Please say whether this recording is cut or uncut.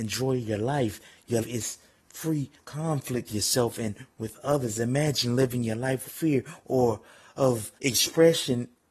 cut